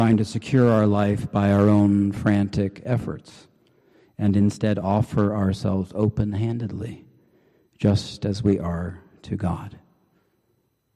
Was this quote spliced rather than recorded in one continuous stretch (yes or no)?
no